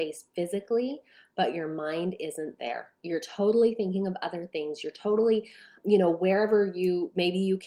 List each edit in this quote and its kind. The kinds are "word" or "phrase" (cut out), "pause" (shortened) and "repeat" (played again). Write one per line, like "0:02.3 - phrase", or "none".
none